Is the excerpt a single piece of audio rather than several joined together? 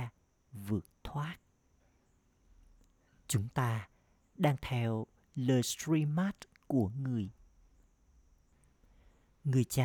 yes; 0 cuts

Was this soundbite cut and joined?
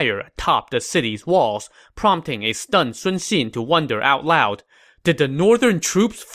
no; 0 cuts

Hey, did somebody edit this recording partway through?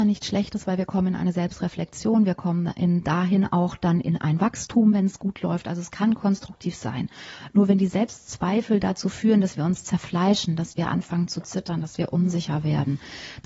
no; 0 cuts

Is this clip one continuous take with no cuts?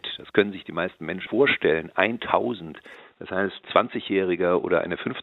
no; 2 cuts; at 1.3 s, 3.6 s

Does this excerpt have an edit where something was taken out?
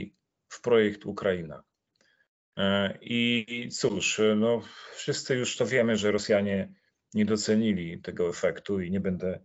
no; 0 cuts

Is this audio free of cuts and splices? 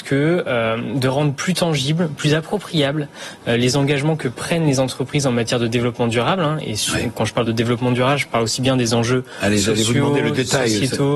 yes; 0 cuts

